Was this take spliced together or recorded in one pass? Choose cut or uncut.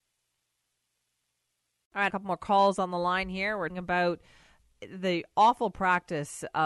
cut